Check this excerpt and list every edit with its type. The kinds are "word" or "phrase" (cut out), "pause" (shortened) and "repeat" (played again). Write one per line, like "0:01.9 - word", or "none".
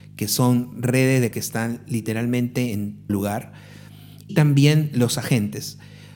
0:01.3 - word
0:03.1 - word
0:04.3 - word